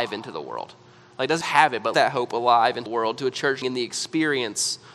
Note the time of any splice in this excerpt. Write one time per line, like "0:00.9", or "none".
0:01.4
0:01.9
0:02.9
0:03.6